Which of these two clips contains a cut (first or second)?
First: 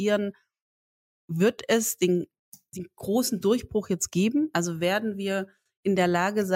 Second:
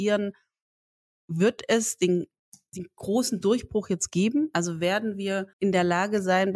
second